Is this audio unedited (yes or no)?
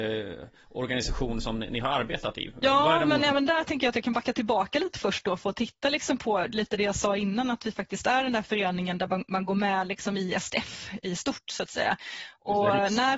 yes